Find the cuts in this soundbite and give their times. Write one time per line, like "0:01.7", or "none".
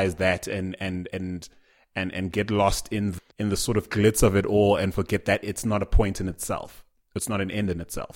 0:03.3